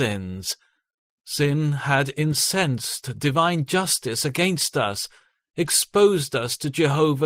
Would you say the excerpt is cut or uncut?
uncut